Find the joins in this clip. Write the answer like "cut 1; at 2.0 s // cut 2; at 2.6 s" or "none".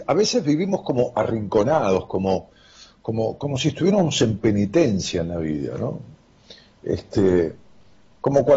cut 1; at 3.4 s